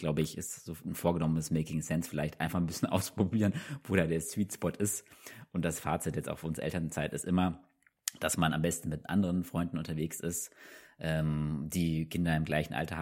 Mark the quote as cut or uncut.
uncut